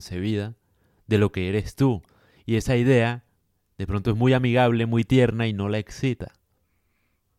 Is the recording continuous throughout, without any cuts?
yes; 0 cuts

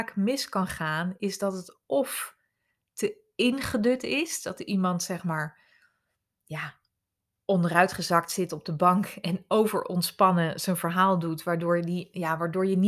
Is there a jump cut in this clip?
no; 0 cuts

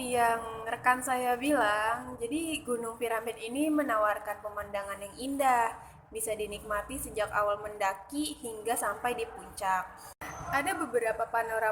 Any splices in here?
no; 0 cuts

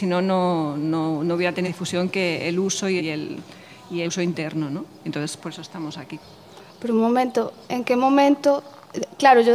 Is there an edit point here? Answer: yes; 4 cuts; at 1.6 s, 3.0 s, 4.0 s, 7.7 s

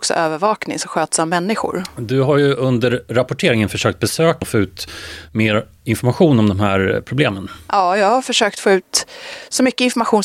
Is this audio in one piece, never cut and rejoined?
no; 1 cut; at 4.4 s

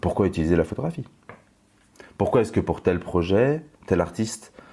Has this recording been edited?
no; 0 cuts

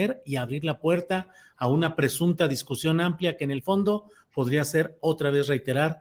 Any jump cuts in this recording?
no; 0 cuts

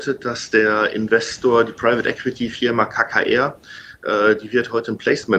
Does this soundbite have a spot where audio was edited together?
no; 0 cuts

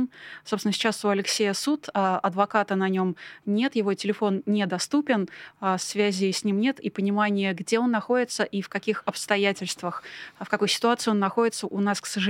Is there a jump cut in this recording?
no; 0 cuts

